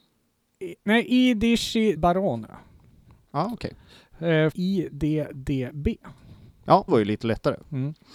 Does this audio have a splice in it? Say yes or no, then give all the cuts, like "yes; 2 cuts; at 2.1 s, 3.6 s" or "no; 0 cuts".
yes; 3 cuts; at 2.0 s, 4.5 s, 6.9 s